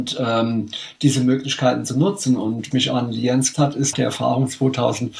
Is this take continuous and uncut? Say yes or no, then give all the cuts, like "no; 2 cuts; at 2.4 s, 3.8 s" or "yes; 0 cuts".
no; 3 cuts; at 2.7 s, 3.5 s, 3.9 s